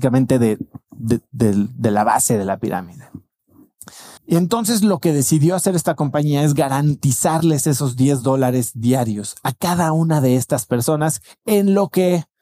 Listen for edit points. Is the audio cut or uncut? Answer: cut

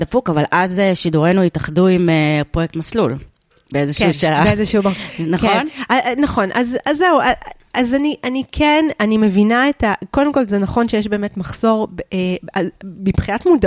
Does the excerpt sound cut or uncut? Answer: uncut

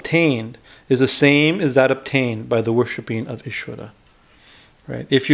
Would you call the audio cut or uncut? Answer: uncut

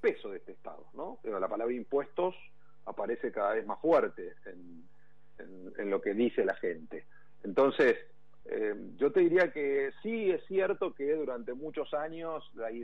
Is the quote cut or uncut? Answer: uncut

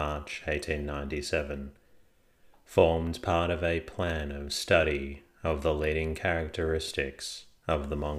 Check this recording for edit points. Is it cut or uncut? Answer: uncut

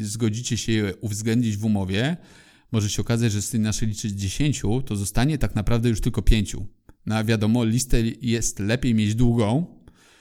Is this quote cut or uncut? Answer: uncut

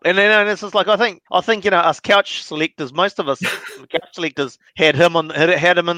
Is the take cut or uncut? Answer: cut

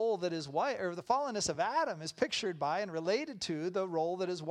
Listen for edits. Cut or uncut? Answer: uncut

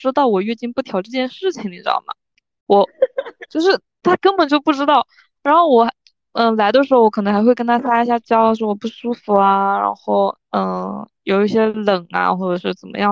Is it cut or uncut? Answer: uncut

